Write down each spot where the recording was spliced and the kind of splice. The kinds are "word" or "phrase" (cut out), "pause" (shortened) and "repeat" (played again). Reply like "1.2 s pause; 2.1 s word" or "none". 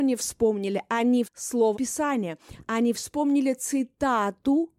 1.2 s word; 1.7 s word